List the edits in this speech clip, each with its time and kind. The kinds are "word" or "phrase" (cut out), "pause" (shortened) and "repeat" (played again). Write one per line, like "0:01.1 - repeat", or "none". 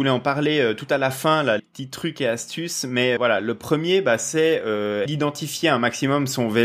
0:01.6 - word
0:03.2 - word
0:05.1 - word

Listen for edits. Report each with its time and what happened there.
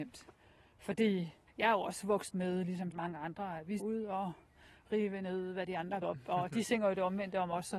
0:01.5 - word
0:02.3 - word
0:02.9 - word
0:03.8 - word
0:06.0 - word

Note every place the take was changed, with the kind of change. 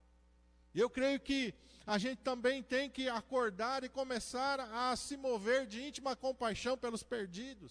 none

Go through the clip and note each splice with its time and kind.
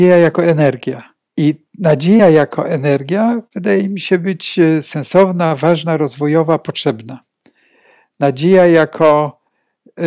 0:01.3 - pause

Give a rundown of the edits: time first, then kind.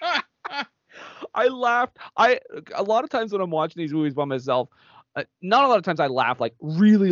none

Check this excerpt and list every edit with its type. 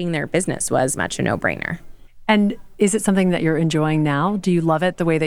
0:01.0 - word

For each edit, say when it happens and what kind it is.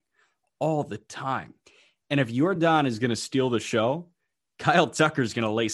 none

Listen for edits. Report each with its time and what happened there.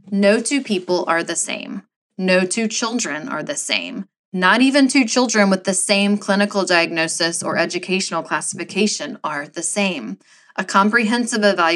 none

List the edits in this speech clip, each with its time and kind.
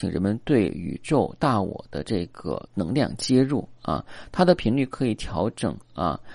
0:02.7 - pause

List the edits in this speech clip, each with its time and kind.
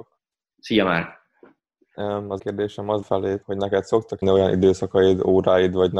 0:02.4 - word
0:03.0 - word
0:03.4 - word
0:04.2 - word

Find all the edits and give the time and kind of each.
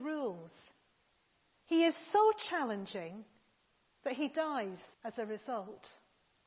0:04.9 - pause

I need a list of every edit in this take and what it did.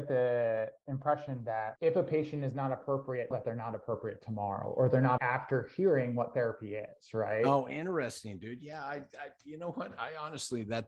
0:01.8 - word
0:03.3 - word
0:05.2 - word

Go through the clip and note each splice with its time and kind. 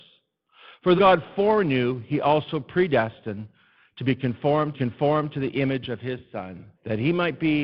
0:01.0 - word
0:04.7 - repeat
0:06.7 - pause

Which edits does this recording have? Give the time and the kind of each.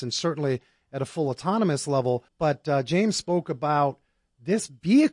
0:02.3 - pause

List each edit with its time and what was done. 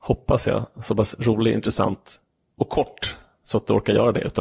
none

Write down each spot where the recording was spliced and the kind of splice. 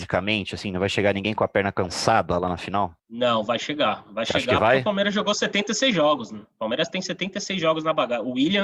0:03.0 - pause

